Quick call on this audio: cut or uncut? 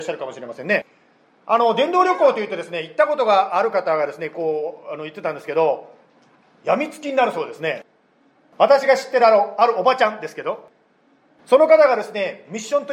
uncut